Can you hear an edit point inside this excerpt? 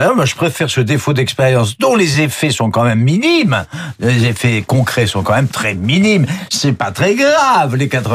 no; 0 cuts

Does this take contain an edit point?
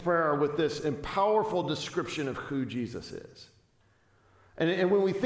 no; 0 cuts

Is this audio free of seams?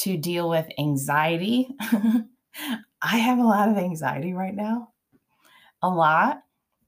yes; 0 cuts

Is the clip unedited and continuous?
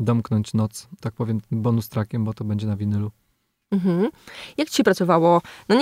no; 1 cut; at 1.0 s

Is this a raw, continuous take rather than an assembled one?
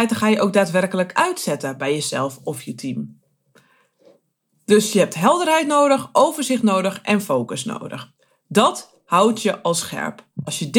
yes; 0 cuts

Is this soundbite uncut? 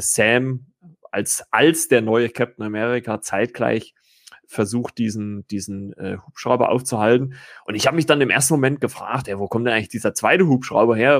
yes; 0 cuts

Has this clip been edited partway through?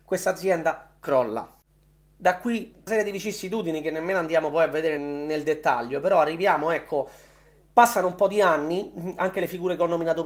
yes; 2 cuts; at 2.9 s, 5.0 s

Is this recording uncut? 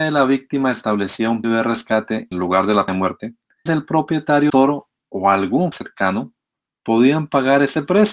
no; 6 cuts; at 1.4 s, 2.3 s, 2.9 s, 3.7 s, 4.5 s, 5.7 s

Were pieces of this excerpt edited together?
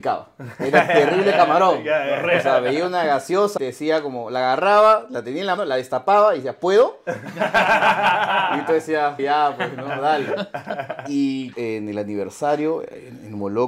yes; 4 cuts; at 3.6 s, 5.6 s, 9.2 s, 11.5 s

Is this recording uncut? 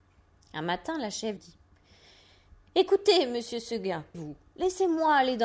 no; 2 cuts; at 1.4 s, 4.1 s

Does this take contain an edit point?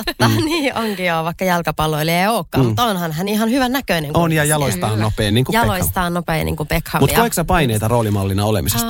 no; 0 cuts

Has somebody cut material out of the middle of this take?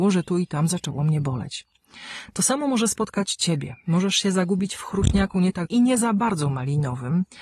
yes; 1 cut; at 5.7 s

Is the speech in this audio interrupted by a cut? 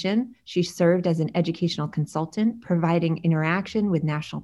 no; 0 cuts

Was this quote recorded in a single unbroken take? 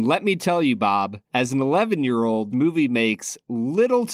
no; 2 cuts; at 1.3 s, 2.5 s

